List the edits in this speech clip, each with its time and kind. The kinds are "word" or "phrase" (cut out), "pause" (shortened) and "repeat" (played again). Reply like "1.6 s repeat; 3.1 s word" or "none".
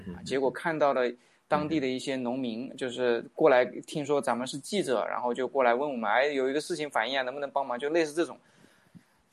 none